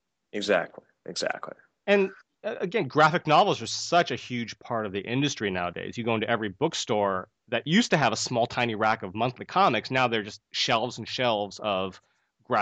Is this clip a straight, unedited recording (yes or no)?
yes